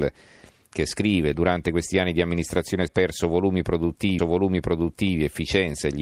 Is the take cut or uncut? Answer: cut